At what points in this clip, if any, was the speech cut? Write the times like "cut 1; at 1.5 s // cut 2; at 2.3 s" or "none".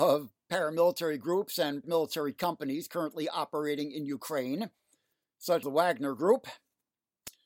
cut 1; at 1.8 s // cut 2; at 5.6 s